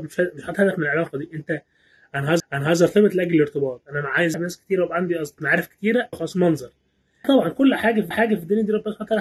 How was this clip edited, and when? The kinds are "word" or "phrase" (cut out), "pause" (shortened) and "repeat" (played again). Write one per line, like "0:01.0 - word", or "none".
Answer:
0:02.4 - repeat
0:04.3 - word
0:05.4 - word
0:06.1 - word
0:07.2 - word
0:08.1 - repeat